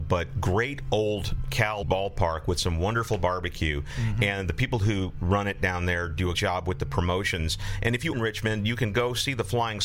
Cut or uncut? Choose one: cut